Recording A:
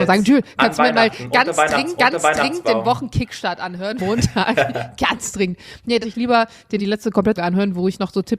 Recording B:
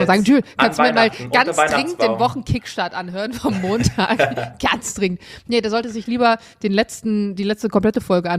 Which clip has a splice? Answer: A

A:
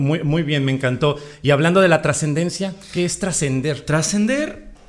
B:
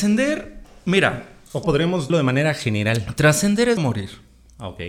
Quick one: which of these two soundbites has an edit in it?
B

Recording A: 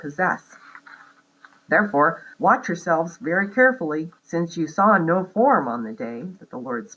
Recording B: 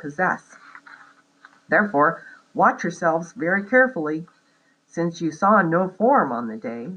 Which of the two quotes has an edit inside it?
A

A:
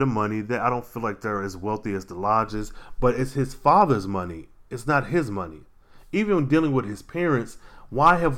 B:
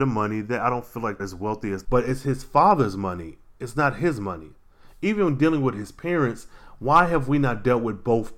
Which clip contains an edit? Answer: B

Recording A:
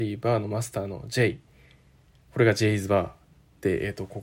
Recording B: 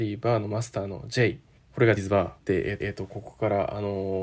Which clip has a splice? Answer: B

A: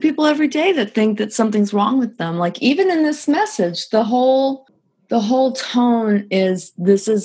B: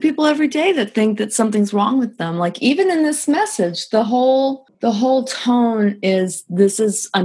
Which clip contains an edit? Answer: B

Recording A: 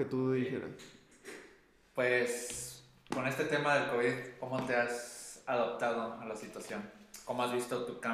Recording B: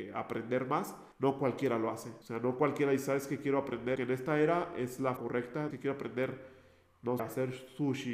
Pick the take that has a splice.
B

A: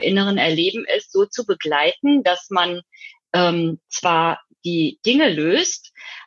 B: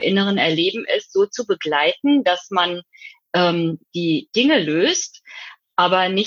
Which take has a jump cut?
B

